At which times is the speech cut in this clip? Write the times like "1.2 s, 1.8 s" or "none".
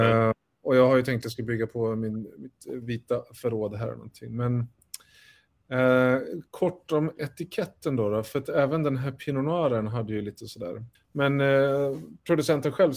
6.5 s, 10.9 s